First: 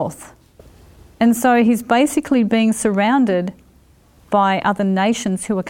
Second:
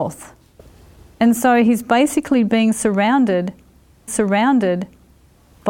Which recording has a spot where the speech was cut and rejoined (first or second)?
second